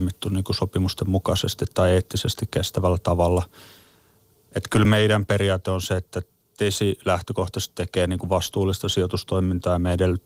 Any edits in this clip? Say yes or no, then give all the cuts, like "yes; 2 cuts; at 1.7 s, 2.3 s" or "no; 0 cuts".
no; 0 cuts